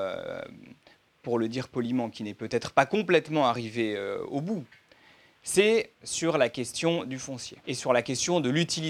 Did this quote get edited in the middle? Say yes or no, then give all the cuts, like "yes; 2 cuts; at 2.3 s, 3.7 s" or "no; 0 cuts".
yes; 2 cuts; at 5.9 s, 7.6 s